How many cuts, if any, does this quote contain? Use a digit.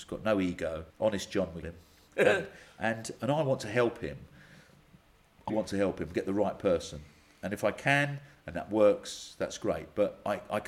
3